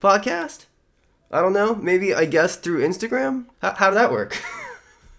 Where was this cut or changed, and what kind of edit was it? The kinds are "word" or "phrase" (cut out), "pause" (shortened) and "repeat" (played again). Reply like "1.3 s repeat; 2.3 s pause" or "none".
3.5 s pause; 3.9 s phrase

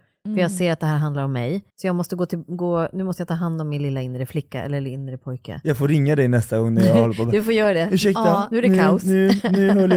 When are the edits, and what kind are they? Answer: 1.7 s pause

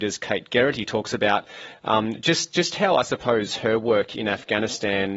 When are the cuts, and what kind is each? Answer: none

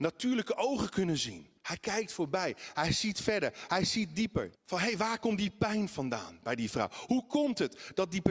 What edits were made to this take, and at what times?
1.6 s pause; 4.6 s pause

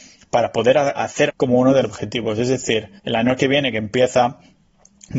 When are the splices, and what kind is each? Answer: 1.0 s word; 1.3 s word; 1.8 s word; 3.0 s pause

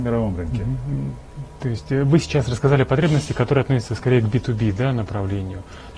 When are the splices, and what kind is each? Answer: none

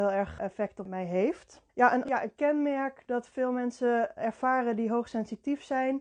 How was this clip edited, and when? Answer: 1.7 s pause; 2.0 s word

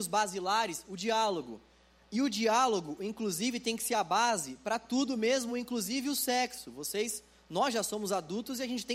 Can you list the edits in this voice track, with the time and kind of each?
none

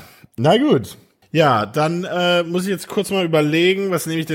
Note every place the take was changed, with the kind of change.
1.2 s pause

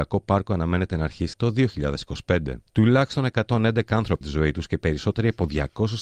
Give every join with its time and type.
1.3 s phrase; 2.7 s pause; 4.2 s word

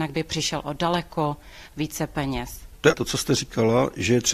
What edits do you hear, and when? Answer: 2.9 s phrase

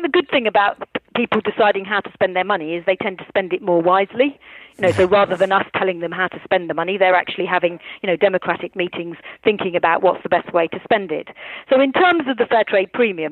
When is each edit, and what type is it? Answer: none

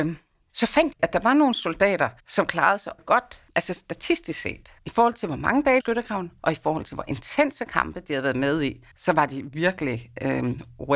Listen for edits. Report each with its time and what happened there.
0.9 s phrase; 2.2 s pause; 3.0 s word; 3.5 s pause; 4.8 s pause; 5.8 s phrase

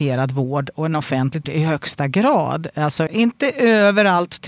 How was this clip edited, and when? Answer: 1.4 s phrase; 3.1 s word

